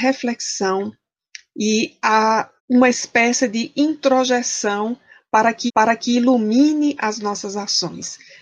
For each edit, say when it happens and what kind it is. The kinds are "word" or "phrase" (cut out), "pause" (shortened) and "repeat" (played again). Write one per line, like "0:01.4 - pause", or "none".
0:02.6 - pause
0:05.7 - repeat